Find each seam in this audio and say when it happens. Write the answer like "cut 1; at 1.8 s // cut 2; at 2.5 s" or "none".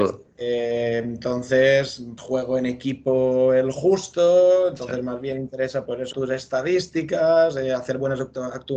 cut 1; at 2.2 s // cut 2; at 6.1 s